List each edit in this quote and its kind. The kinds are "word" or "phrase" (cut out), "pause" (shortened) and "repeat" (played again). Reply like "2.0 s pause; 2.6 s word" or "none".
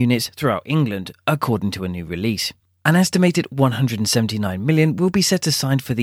none